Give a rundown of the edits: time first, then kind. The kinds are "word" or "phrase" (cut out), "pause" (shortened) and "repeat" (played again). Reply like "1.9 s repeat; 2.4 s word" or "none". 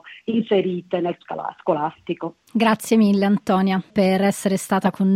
1.2 s word; 3.9 s word